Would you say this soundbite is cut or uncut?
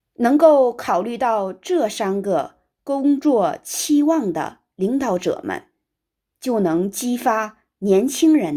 uncut